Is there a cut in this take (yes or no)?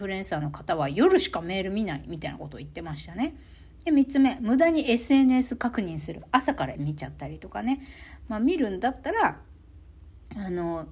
yes